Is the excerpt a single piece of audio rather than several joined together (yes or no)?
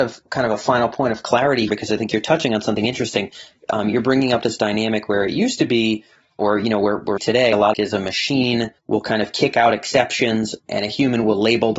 no